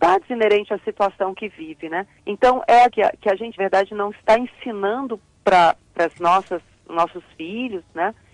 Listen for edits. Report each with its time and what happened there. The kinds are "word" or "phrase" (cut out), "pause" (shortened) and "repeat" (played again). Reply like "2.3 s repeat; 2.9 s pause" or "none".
2.2 s pause; 2.9 s word; 3.6 s word; 5.8 s word